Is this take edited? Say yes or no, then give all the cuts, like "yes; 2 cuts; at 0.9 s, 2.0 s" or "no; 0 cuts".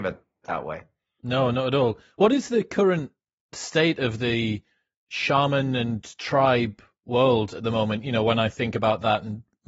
no; 0 cuts